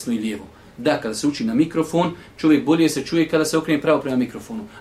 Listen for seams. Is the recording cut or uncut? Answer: uncut